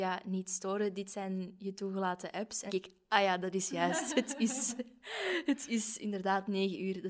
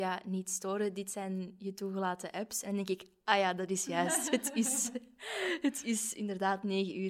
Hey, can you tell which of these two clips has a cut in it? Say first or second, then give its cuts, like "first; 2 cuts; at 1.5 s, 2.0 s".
first; 1 cut; at 2.7 s